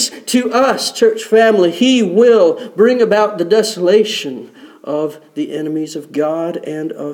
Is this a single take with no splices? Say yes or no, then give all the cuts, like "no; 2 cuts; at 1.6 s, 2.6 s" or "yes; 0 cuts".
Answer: yes; 0 cuts